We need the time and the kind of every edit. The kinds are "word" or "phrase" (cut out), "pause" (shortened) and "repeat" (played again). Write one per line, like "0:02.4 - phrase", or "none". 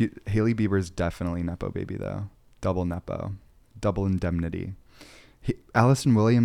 none